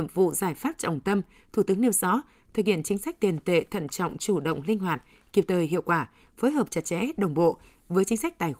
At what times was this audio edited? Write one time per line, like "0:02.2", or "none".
none